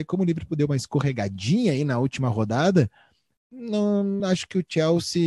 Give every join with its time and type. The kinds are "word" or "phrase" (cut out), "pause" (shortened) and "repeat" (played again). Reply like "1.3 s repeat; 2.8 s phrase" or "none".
none